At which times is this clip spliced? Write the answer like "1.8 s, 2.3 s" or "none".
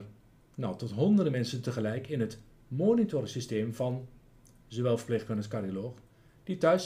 none